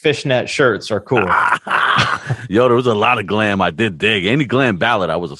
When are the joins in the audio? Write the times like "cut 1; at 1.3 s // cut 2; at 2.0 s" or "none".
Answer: none